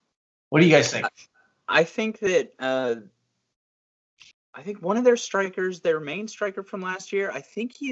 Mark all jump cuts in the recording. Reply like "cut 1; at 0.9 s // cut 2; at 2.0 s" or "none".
none